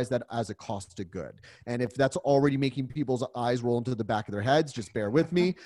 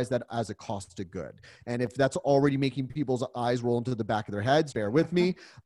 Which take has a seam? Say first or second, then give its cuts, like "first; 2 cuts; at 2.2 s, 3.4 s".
second; 1 cut; at 4.7 s